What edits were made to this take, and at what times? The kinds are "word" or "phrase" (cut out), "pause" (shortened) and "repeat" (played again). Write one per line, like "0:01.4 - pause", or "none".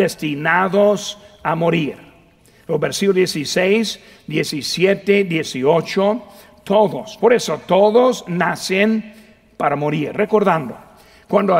none